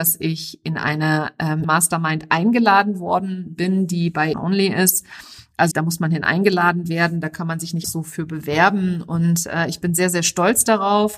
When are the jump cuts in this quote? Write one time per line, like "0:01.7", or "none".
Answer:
0:01.6
0:04.3
0:05.7
0:07.8